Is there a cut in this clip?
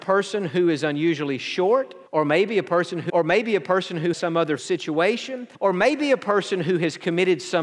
yes; 5 cuts; at 2.1 s, 3.1 s, 4.1 s, 4.6 s, 5.5 s

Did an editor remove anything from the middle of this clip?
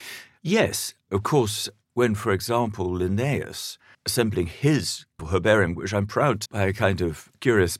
yes; 3 cuts; at 3.9 s, 5.2 s, 6.5 s

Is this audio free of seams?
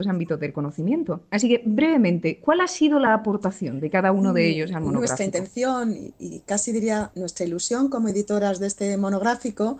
yes; 0 cuts

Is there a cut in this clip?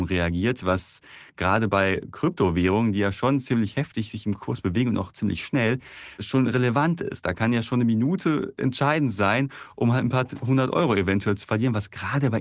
no; 0 cuts

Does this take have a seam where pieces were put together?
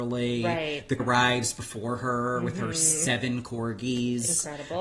yes; 1 cut; at 1.0 s

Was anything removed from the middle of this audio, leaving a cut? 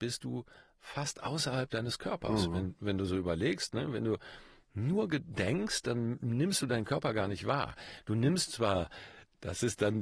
no; 0 cuts

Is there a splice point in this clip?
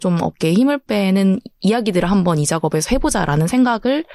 no; 0 cuts

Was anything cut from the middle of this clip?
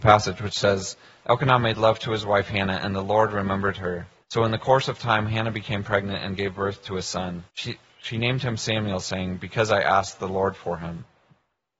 yes; 2 cuts; at 4.2 s, 7.5 s

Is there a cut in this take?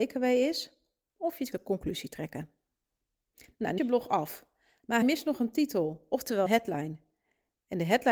yes; 4 cuts; at 1.5 s, 3.8 s, 5.0 s, 6.5 s

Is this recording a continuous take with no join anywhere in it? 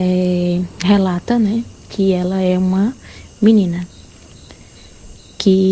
yes; 0 cuts

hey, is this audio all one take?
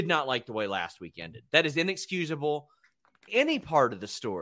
no; 1 cut; at 3.3 s

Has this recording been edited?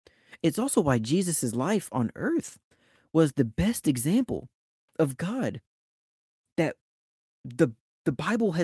no; 0 cuts

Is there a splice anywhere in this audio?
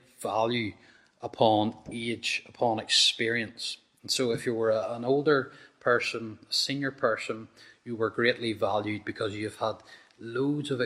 no; 0 cuts

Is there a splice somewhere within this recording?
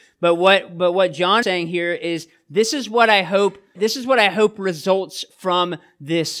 yes; 2 cuts; at 1.4 s, 3.7 s

